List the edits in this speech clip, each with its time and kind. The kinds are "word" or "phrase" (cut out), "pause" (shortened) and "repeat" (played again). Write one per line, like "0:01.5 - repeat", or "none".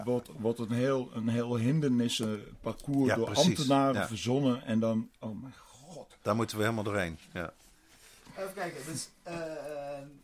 none